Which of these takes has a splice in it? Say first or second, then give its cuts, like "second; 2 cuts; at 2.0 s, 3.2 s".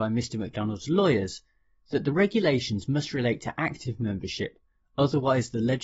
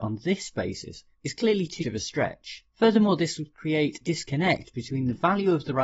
second; 4 cuts; at 1.1 s, 1.8 s, 2.7 s, 4.0 s